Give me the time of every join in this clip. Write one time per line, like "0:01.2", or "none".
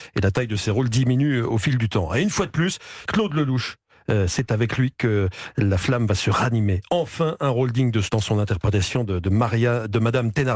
0:03.1
0:08.1